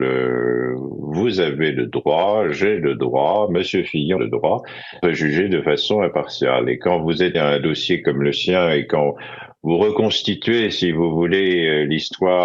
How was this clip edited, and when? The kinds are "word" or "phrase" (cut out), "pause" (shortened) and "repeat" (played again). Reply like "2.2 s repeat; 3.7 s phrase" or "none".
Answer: 4.2 s word; 5.0 s word; 7.3 s word